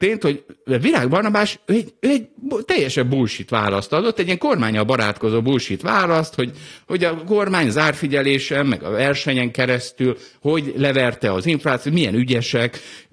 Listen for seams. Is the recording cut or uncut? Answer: uncut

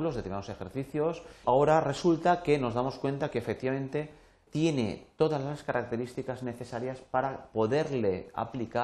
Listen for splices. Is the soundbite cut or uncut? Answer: cut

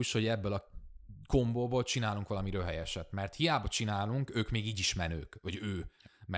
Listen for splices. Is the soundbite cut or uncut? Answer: uncut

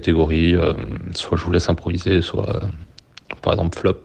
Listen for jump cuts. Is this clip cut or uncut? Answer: uncut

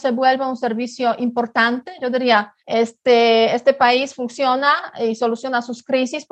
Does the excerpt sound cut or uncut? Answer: cut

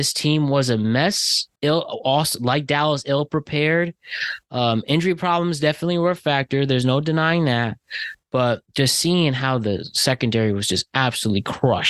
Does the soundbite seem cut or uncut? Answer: cut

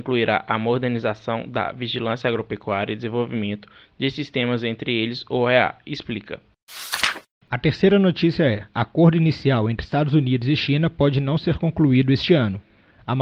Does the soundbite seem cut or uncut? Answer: uncut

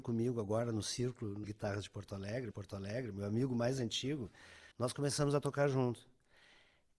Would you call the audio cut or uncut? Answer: cut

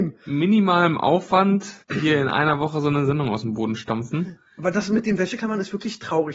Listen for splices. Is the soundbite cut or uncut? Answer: cut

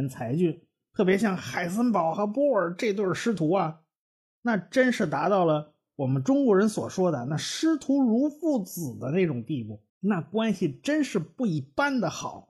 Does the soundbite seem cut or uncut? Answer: cut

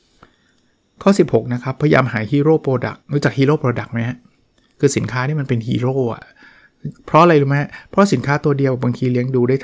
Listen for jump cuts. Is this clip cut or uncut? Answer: cut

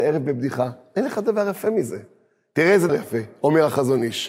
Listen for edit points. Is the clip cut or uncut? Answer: cut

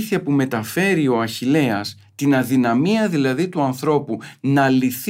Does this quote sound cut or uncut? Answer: uncut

